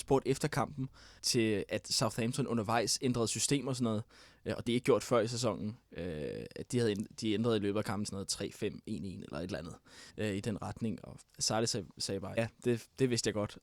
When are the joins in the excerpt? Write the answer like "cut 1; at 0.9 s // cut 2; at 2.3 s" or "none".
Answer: cut 1; at 1.2 s // cut 2; at 4.7 s // cut 3; at 8.0 s // cut 4; at 10.1 s // cut 5; at 10.4 s // cut 6; at 11.3 s // cut 7; at 12.4 s

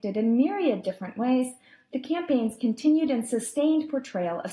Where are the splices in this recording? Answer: none

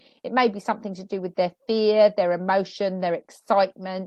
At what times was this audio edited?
none

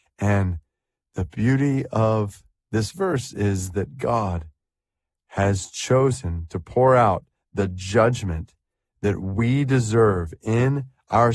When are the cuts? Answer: none

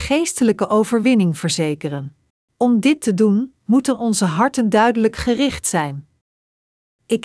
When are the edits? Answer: cut 1; at 2.4 s // cut 2; at 3.6 s

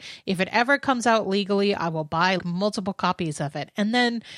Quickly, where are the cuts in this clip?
cut 1; at 2.4 s

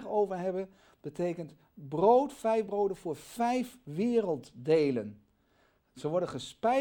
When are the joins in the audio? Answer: none

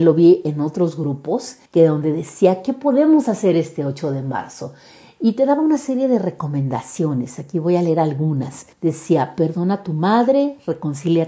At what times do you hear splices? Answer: cut 1; at 1.7 s // cut 2; at 8.7 s

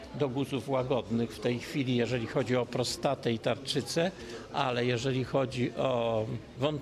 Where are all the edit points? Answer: none

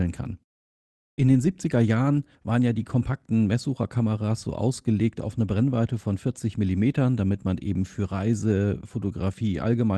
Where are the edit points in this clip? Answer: cut 1; at 2.3 s

